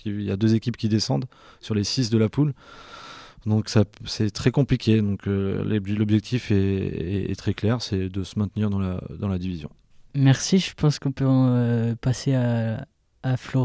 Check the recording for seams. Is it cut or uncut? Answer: cut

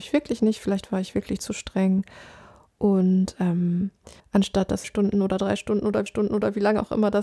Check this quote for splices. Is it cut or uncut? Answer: cut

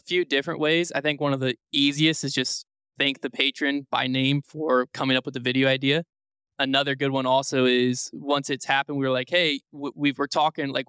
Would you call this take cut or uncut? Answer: uncut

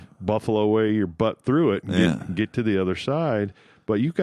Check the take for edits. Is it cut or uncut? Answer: uncut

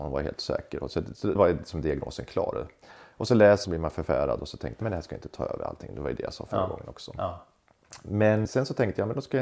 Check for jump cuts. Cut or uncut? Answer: cut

